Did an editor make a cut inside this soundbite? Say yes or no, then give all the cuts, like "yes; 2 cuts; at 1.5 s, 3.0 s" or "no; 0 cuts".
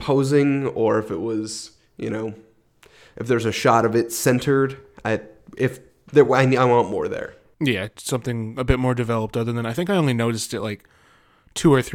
no; 0 cuts